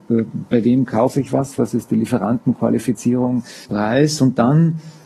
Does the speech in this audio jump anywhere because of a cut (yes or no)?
yes